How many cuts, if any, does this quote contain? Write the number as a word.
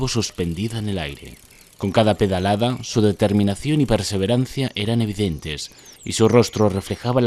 two